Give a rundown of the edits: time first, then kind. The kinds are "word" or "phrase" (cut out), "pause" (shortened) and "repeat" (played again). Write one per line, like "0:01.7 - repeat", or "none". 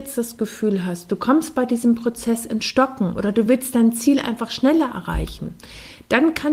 none